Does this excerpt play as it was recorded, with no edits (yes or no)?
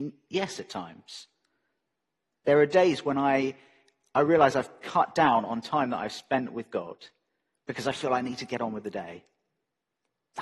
yes